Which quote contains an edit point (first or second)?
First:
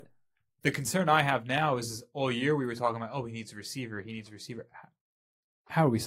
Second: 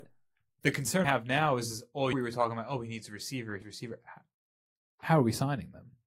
second